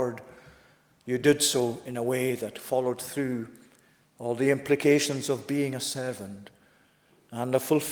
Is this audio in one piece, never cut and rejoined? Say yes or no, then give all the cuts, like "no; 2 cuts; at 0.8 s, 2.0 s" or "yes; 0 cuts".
yes; 0 cuts